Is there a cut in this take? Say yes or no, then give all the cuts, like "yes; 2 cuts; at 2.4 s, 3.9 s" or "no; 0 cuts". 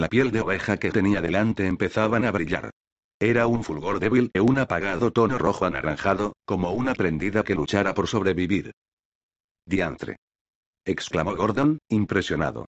yes; 3 cuts; at 0.9 s, 4.3 s, 7.0 s